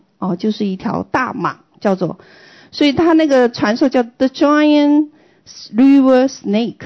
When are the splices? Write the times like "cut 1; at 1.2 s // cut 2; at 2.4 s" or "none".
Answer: none